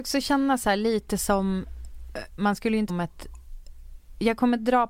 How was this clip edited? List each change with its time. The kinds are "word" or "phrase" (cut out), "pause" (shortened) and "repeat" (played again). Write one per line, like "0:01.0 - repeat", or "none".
0:02.4 - word
0:02.9 - word